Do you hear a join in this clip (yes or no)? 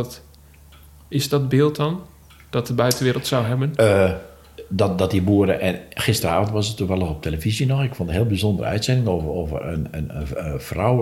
no